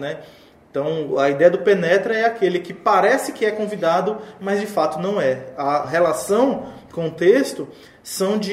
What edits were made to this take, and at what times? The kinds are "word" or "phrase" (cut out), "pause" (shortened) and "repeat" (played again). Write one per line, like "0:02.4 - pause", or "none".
0:05.8 - word

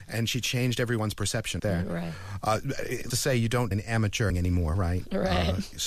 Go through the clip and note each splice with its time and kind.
0:01.6 - word
0:03.1 - word
0:03.7 - word
0:04.3 - word

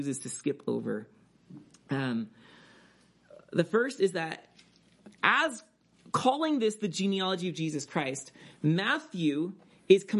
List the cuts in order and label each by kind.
none

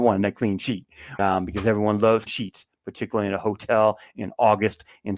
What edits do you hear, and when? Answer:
0:01.2 - word
0:02.3 - word

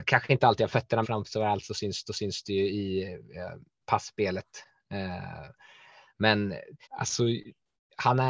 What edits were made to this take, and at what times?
0:01.0 - phrase
0:02.1 - repeat
0:06.8 - pause

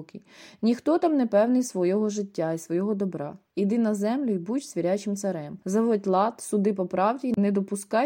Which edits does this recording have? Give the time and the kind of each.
0:05.6 - pause

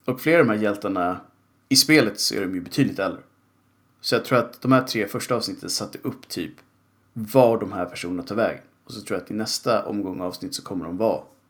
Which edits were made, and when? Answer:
none

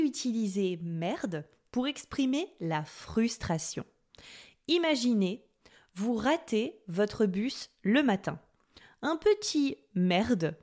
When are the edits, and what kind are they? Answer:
none

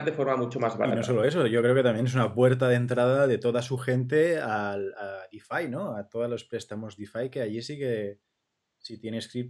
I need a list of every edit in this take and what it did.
none

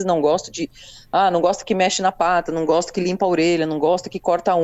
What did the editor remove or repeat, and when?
none

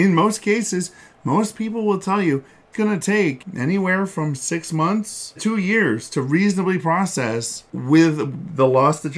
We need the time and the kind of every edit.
0:02.7 - word
0:05.4 - word

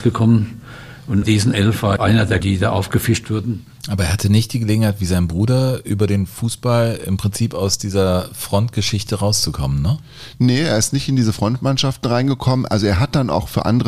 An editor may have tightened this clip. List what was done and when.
0:01.2 - word
0:02.0 - word
0:02.4 - word

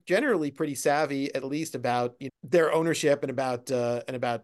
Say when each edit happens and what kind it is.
0:02.3 - word

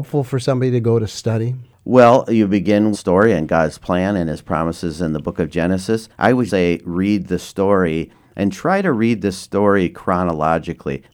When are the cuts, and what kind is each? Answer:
0:02.9 - phrase
0:06.5 - word

